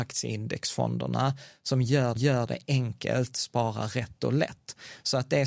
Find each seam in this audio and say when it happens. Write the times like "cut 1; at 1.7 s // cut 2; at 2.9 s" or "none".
cut 1; at 2.2 s // cut 2; at 3.3 s